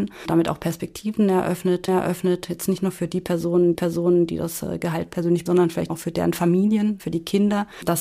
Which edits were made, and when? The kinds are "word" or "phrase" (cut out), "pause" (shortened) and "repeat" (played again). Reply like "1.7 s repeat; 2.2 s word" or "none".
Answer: 1.9 s repeat; 3.7 s repeat; 5.5 s word; 5.9 s word

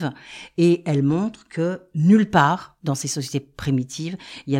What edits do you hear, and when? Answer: none

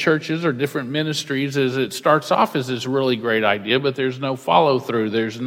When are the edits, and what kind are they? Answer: none

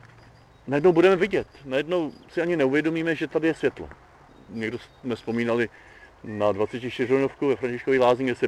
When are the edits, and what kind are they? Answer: 2.2 s pause; 4.3 s pause

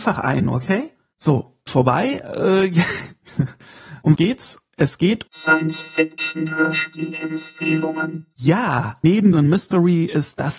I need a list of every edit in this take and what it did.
1.7 s word; 4.1 s word; 5.3 s word; 9.3 s word

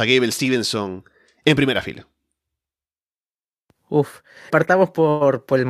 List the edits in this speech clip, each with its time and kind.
4.5 s word

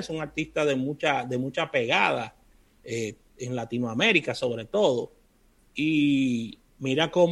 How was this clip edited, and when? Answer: none

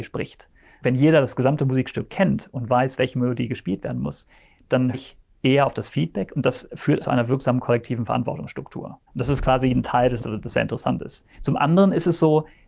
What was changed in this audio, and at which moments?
4.9 s word; 7.0 s word; 9.1 s pause; 10.2 s word; 11.3 s pause

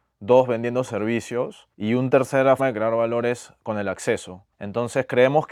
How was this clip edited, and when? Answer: 1.7 s pause; 2.6 s word; 4.5 s pause

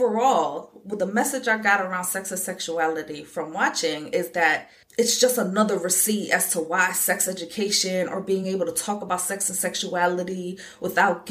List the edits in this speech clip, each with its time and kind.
none

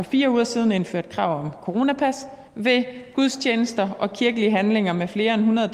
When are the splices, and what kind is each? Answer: 2.5 s pause

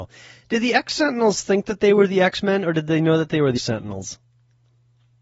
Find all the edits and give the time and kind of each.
3.6 s word

